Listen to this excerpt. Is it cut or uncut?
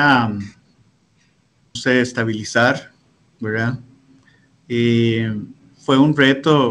cut